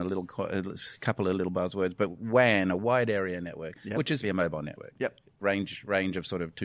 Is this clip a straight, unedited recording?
no; 1 cut; at 4.2 s

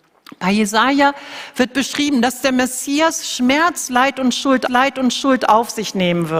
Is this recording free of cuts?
no; 1 cut; at 4.7 s

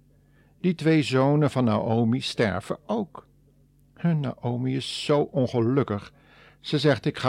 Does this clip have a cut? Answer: no; 0 cuts

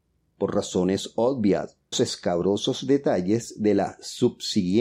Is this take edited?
yes; 1 cut; at 1.9 s

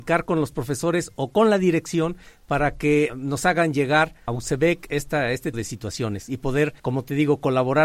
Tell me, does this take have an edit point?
yes; 4 cuts; at 3.1 s, 4.3 s, 5.5 s, 6.8 s

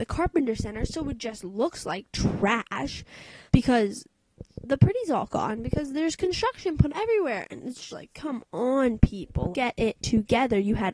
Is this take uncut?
no; 4 cuts; at 3.5 s, 6.9 s, 7.9 s, 9.5 s

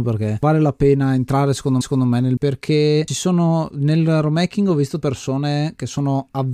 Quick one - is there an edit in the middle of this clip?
yes; 3 cuts; at 1.8 s, 2.4 s, 5.0 s

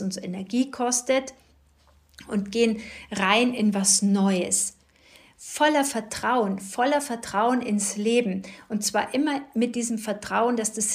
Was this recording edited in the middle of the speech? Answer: no; 0 cuts

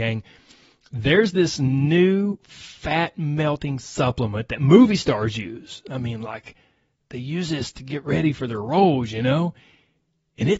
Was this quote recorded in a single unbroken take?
yes; 0 cuts

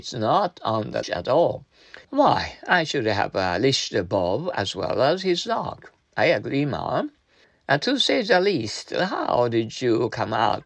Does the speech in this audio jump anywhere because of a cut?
yes; 3 cuts; at 1.0 s, 2.0 s, 7.4 s

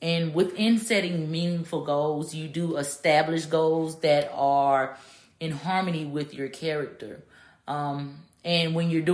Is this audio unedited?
yes; 0 cuts

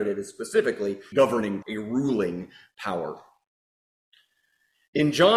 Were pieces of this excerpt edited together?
yes; 2 cuts; at 1.1 s, 1.6 s

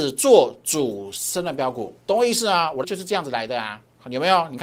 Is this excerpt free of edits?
no; 2 cuts; at 2.0 s, 2.8 s

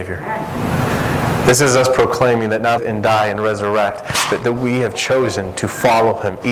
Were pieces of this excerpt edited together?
yes; 1 cut; at 2.8 s

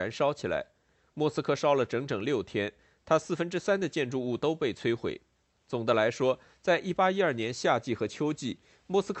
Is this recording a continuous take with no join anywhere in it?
yes; 0 cuts

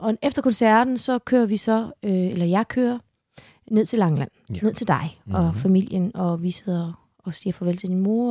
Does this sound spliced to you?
no; 0 cuts

